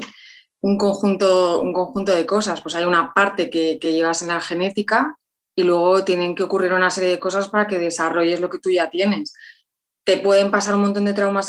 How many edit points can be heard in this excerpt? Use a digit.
0